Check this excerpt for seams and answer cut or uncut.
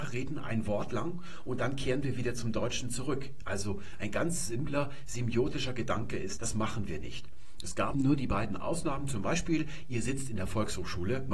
cut